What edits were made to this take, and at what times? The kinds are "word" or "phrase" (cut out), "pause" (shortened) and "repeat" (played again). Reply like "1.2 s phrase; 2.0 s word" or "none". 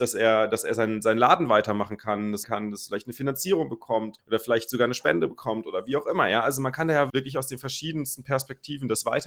2.4 s phrase; 4.2 s word; 7.1 s word